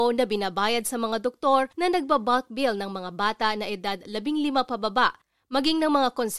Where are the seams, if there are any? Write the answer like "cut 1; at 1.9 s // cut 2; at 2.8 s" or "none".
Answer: cut 1; at 1.7 s